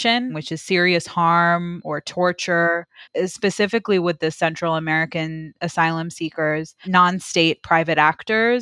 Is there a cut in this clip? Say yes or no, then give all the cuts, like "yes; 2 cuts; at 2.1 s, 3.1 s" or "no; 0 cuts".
no; 0 cuts